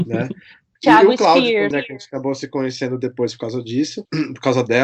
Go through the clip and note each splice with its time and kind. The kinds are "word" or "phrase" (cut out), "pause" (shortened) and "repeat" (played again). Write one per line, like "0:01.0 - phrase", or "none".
0:01.7 - word